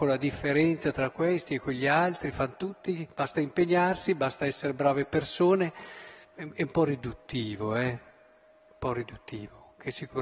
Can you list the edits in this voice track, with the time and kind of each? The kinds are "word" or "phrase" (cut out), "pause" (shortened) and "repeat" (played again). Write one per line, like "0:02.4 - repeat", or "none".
none